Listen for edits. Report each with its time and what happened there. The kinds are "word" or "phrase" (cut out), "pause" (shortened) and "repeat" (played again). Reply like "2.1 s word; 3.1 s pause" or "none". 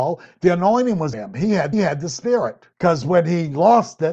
1.1 s word; 1.7 s repeat; 2.7 s pause